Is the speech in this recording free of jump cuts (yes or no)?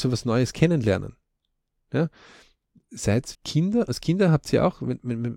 no